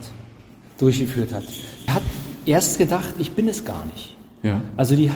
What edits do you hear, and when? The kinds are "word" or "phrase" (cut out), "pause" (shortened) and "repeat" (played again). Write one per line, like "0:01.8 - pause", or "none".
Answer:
0:01.9 - word